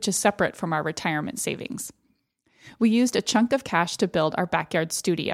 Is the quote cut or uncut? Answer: uncut